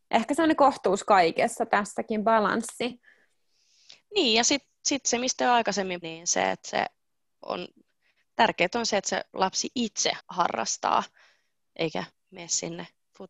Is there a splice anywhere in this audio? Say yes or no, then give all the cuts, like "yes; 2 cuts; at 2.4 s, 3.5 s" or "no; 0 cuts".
yes; 2 cuts; at 6.0 s, 10.2 s